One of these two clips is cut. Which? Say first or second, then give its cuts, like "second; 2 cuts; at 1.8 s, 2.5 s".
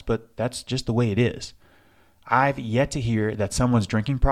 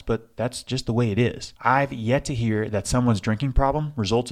second; 1 cut; at 1.6 s